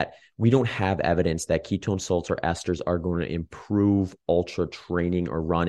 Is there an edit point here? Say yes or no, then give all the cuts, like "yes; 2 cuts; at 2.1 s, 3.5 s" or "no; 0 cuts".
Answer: no; 0 cuts